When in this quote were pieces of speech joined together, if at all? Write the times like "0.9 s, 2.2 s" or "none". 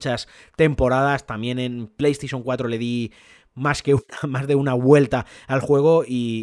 none